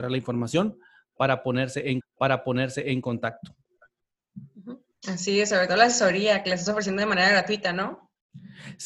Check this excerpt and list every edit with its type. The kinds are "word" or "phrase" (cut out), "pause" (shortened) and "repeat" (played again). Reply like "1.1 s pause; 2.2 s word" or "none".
2.0 s repeat

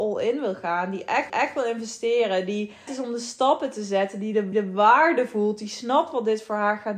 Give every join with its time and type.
1.3 s repeat; 2.9 s word; 4.5 s repeat

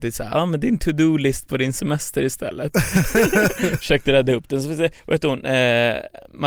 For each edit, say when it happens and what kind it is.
5.0 s pause

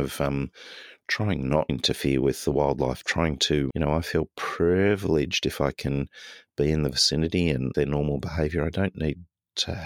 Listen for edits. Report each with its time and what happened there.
1.7 s word; 3.7 s word; 7.7 s phrase

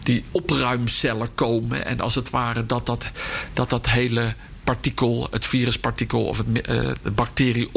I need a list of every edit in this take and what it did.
none

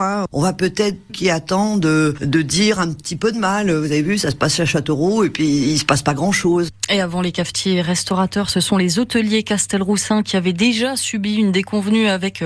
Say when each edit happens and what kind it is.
1.1 s phrase

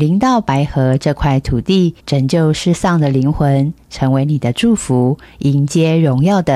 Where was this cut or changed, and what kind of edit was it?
2.0 s pause

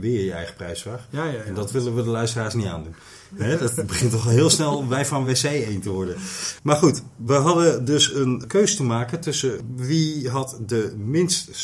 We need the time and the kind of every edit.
none

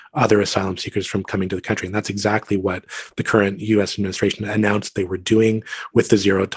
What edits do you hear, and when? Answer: none

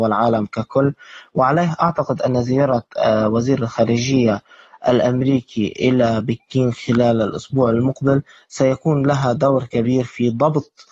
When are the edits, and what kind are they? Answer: none

